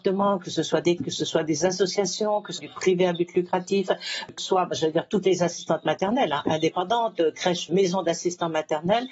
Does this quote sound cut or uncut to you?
cut